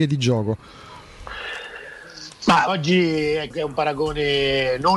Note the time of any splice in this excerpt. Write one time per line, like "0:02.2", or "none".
0:02.7
0:03.5